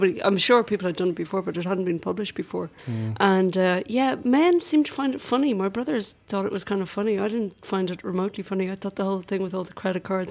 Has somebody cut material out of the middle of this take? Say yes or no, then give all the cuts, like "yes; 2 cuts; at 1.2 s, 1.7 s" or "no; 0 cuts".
yes; 1 cut; at 2.8 s